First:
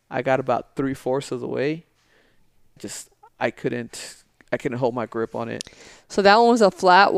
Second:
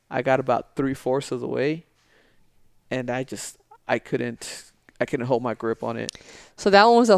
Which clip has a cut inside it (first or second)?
first